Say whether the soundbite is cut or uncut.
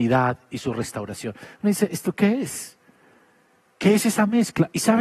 uncut